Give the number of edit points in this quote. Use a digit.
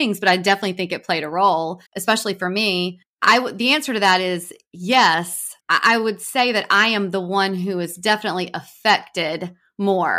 2